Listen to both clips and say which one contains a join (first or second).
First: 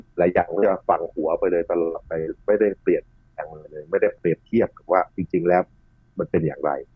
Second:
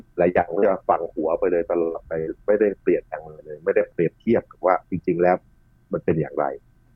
second